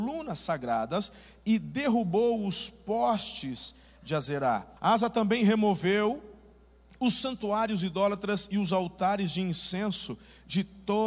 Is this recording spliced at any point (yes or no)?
yes